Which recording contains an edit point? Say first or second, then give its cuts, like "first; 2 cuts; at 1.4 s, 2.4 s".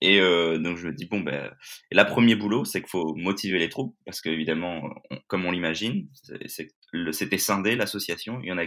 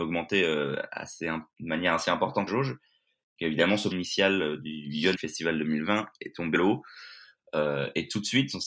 second; 4 cuts; at 2.5 s, 3.9 s, 5.1 s, 6.5 s